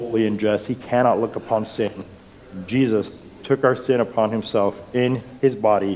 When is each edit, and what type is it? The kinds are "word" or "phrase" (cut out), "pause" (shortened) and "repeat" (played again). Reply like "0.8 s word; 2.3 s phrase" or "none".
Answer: none